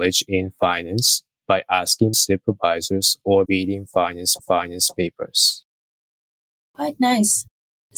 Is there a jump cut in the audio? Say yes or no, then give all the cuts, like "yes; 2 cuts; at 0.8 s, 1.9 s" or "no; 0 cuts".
yes; 3 cuts; at 2.1 s, 3.5 s, 4.4 s